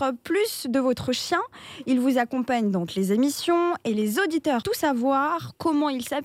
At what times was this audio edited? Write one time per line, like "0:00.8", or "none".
0:02.9
0:04.6